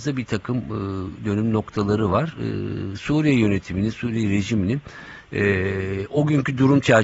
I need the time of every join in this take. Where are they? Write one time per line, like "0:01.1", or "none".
none

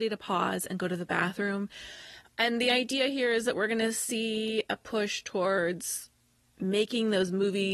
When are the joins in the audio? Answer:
none

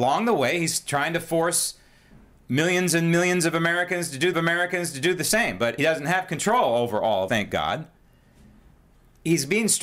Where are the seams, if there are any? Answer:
0:04.3
0:05.8
0:07.3

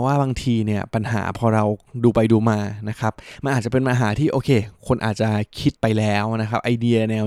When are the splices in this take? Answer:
0:05.8

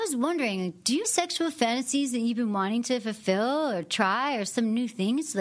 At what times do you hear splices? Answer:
0:01.0

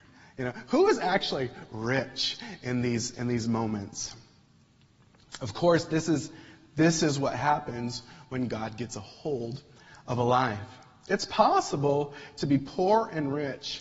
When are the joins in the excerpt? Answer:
none

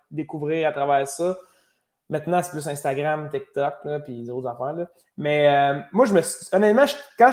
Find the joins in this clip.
none

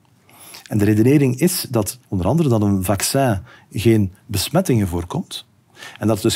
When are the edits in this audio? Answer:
0:02.0

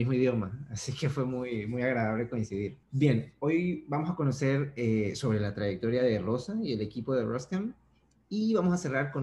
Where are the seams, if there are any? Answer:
0:02.8

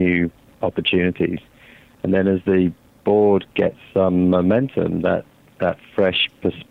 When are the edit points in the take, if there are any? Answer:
none

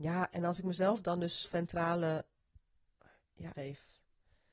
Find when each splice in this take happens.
0:01.4
0:03.5

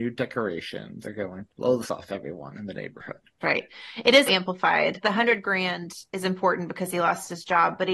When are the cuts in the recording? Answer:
0:01.0
0:01.5
0:01.8
0:03.4
0:04.3
0:05.0

